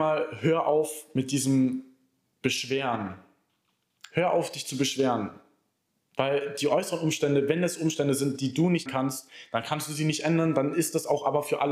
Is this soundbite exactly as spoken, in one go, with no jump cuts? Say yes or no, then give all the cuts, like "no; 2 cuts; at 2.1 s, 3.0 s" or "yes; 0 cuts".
no; 1 cut; at 8.9 s